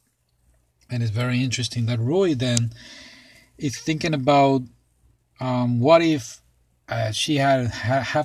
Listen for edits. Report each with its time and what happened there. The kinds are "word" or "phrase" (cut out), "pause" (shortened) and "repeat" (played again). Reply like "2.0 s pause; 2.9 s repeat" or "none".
none